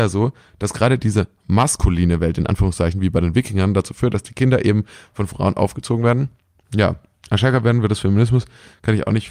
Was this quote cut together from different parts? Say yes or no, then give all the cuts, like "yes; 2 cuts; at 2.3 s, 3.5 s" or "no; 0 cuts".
no; 0 cuts